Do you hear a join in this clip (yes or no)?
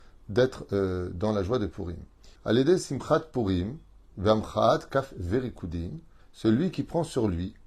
yes